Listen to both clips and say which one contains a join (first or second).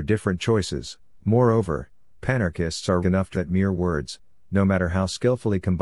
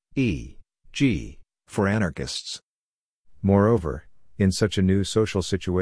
first